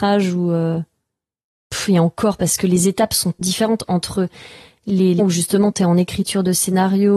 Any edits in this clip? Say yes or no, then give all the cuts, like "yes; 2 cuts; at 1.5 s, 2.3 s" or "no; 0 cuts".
yes; 2 cuts; at 3.4 s, 5.2 s